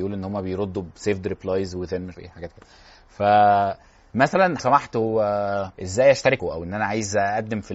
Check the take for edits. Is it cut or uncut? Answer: cut